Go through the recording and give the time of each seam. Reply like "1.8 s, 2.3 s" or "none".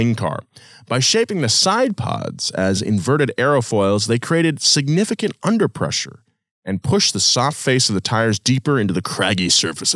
none